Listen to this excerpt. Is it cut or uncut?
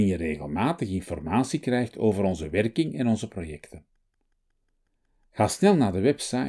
uncut